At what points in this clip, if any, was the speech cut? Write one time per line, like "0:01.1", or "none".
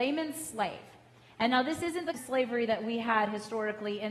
0:02.1